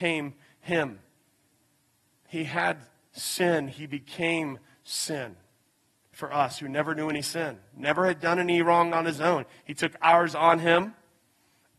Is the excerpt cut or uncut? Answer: uncut